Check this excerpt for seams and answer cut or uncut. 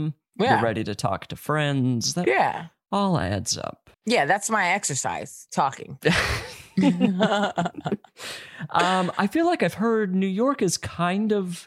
cut